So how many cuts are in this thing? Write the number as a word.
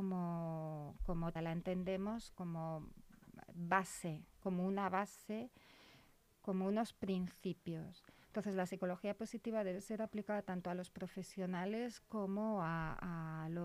two